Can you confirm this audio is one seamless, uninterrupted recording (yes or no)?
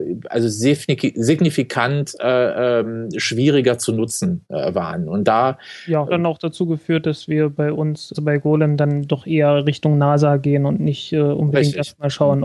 no